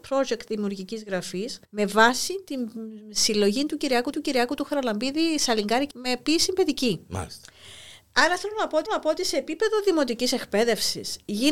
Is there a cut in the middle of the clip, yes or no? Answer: yes